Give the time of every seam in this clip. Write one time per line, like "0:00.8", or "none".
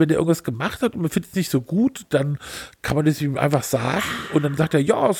none